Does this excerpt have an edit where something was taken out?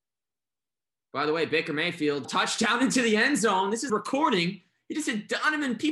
yes; 2 cuts; at 2.2 s, 3.9 s

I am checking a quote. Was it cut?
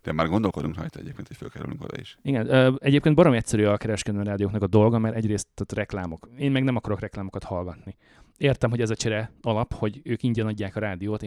no; 0 cuts

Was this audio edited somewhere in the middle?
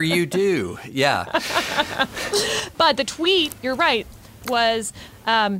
yes; 1 cut; at 4.4 s

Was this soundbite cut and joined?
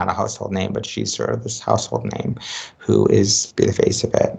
no; 0 cuts

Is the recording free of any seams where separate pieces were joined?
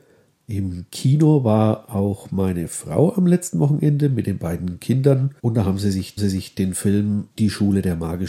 no; 3 cuts; at 5.4 s, 6.2 s, 7.3 s

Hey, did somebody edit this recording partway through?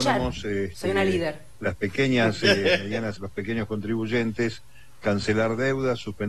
yes; 1 cut; at 3.1 s

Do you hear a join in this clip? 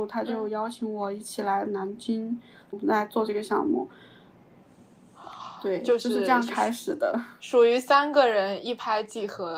no; 0 cuts

